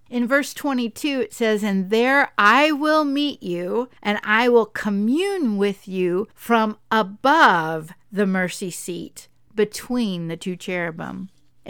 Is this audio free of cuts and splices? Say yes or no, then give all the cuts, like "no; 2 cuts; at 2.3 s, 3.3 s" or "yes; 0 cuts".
no; 2 cuts; at 4.0 s, 6.3 s